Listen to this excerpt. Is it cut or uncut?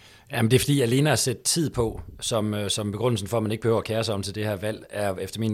uncut